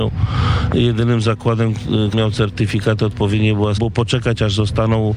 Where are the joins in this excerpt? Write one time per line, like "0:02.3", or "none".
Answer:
0:02.1
0:03.8